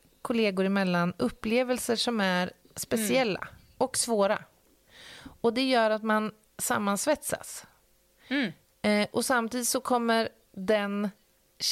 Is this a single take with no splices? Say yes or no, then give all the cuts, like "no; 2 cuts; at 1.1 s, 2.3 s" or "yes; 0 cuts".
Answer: yes; 0 cuts